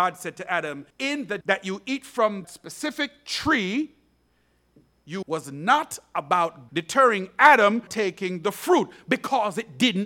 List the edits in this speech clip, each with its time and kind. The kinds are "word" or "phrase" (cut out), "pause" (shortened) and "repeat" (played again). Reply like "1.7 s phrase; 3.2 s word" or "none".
0.9 s pause; 1.4 s word; 2.4 s word; 5.2 s phrase; 6.7 s word; 7.9 s word